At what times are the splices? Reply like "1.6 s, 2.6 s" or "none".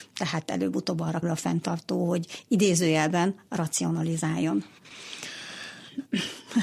1.2 s